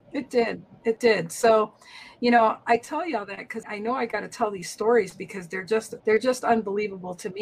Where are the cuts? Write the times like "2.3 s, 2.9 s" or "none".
3.6 s, 6.0 s